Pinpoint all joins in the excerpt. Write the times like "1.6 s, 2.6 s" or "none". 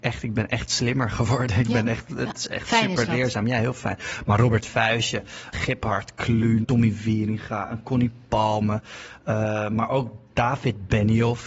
5.5 s, 6.6 s